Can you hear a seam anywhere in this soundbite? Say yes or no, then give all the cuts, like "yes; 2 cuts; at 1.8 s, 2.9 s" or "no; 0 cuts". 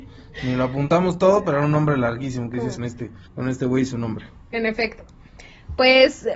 yes; 2 cuts; at 2.8 s, 3.3 s